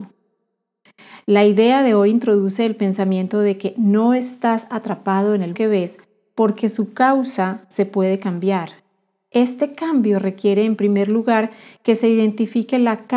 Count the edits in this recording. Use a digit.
1